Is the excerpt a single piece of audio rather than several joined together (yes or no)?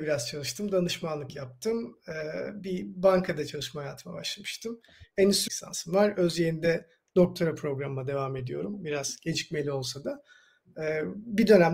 no